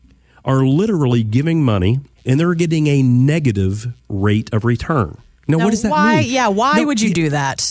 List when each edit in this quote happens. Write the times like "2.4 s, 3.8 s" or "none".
2.2 s